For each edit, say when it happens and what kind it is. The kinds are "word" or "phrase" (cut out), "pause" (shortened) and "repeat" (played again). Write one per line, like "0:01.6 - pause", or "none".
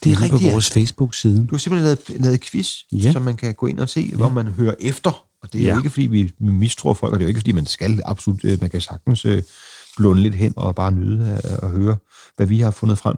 0:10.6 - word

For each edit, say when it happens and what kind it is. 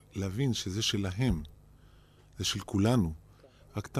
none

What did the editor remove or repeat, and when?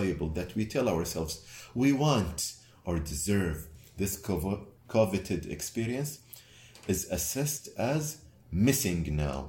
0:04.8 - pause

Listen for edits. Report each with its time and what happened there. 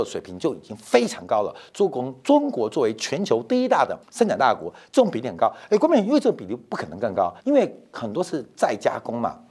0:04.0 - pause
0:07.4 - pause

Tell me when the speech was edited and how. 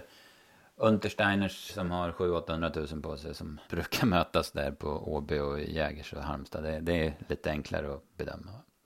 0:01.7 - word
0:03.6 - pause

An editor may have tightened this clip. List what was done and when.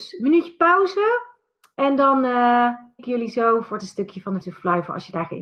0:03.0 - word
0:03.8 - word
0:04.4 - word

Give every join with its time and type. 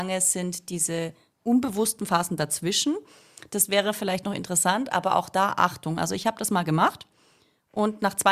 none

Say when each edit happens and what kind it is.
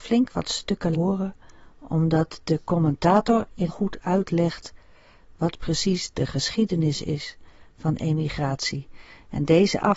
0:00.9 - word
0:03.7 - phrase

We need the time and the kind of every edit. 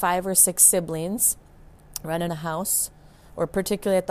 0:02.3 - word
0:03.1 - pause

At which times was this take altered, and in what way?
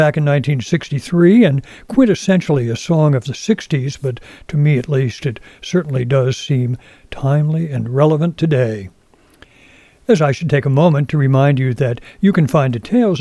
0:10.2 - word

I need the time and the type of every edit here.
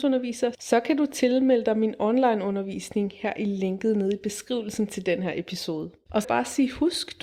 0:06.2 - phrase

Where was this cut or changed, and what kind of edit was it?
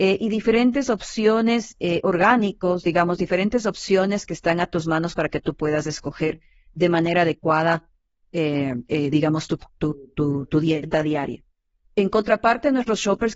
none

